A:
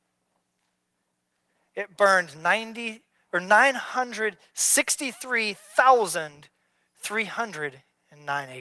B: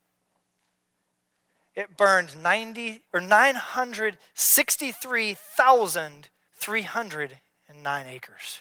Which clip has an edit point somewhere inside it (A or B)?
B